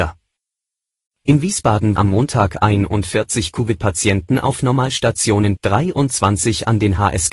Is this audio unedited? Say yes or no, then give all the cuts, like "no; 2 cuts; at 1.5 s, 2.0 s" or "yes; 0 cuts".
no; 2 cuts; at 2.0 s, 5.6 s